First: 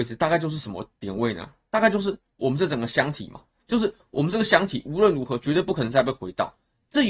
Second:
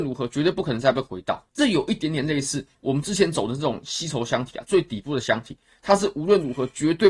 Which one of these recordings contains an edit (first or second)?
second